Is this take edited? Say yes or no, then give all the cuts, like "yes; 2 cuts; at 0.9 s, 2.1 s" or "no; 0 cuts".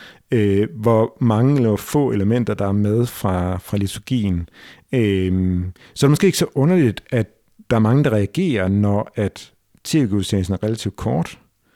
no; 0 cuts